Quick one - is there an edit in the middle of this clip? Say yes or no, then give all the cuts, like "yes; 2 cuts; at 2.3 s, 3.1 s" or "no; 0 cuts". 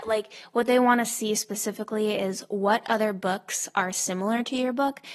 no; 0 cuts